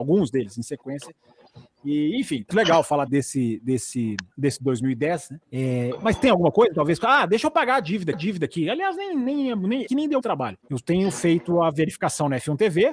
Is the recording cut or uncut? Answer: cut